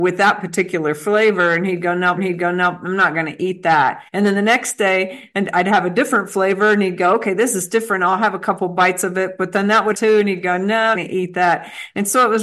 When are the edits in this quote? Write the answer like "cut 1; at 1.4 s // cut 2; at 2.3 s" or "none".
cut 1; at 2.2 s // cut 2; at 4.1 s // cut 3; at 9.9 s // cut 4; at 10.9 s